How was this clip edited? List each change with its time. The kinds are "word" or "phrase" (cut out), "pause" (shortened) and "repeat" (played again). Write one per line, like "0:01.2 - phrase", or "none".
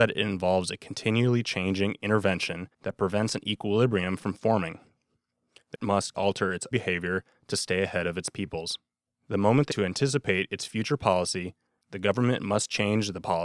0:02.7 - pause
0:05.7 - word
0:06.1 - word
0:06.7 - word
0:09.1 - pause
0:09.7 - word